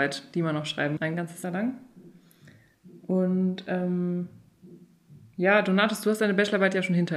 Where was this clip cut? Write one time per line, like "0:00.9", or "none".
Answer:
0:01.0
0:01.4